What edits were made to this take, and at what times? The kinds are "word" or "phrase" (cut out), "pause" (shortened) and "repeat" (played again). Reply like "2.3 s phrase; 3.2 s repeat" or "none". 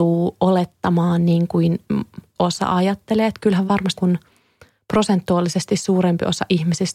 2.4 s word; 3.7 s word; 4.0 s word